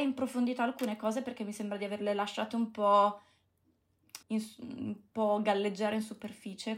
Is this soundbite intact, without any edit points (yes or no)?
no